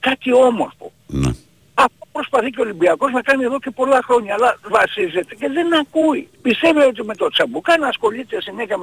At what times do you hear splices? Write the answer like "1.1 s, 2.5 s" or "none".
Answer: 1.0 s, 4.7 s, 6.3 s